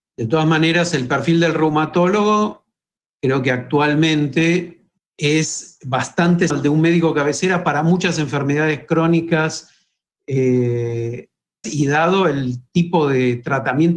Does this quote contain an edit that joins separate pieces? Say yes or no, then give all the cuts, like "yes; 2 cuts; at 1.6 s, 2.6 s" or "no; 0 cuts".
yes; 4 cuts; at 3.0 s, 5.0 s, 6.5 s, 11.6 s